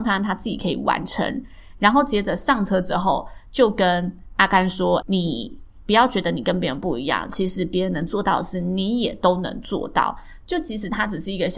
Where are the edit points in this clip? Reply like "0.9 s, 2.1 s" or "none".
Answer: 5.0 s